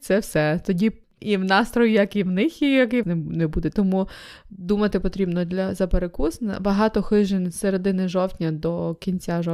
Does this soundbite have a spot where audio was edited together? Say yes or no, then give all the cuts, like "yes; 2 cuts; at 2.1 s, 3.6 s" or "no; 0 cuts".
yes; 1 cut; at 3.0 s